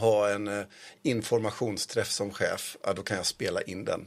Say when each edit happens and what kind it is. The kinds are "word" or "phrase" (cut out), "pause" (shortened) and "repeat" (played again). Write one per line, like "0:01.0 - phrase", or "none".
none